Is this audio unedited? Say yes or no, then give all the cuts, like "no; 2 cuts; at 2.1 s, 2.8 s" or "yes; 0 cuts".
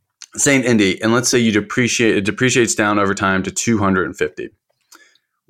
yes; 0 cuts